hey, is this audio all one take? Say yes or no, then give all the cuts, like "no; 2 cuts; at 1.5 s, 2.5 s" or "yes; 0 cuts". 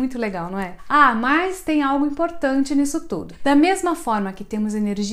yes; 0 cuts